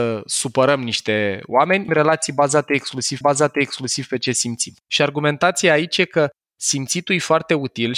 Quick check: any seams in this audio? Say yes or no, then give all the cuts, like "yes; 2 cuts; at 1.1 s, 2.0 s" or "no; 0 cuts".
yes; 3 cuts; at 1.9 s, 3.2 s, 4.8 s